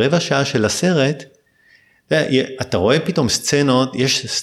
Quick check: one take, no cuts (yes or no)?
yes